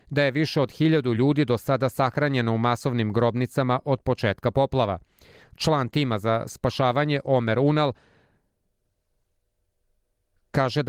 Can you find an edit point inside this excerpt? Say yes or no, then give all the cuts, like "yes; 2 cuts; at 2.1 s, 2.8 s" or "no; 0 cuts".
no; 0 cuts